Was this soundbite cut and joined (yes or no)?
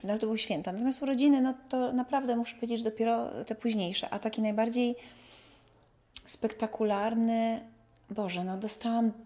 no